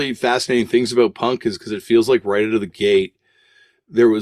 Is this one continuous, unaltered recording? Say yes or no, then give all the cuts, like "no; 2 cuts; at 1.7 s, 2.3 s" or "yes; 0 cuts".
yes; 0 cuts